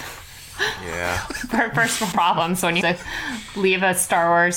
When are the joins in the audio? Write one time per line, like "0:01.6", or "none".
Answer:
0:02.1
0:02.8